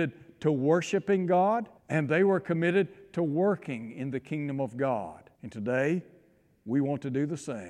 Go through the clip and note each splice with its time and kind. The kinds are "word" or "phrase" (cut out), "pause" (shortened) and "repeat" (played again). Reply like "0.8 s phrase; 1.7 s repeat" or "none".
1.8 s pause; 5.3 s pause

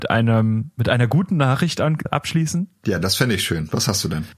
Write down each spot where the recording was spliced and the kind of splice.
2.1 s word

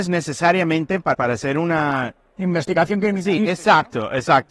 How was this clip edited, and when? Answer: 1.1 s word

